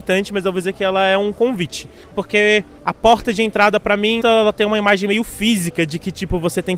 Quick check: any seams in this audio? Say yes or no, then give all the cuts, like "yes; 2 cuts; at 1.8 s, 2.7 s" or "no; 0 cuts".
yes; 1 cut; at 4.2 s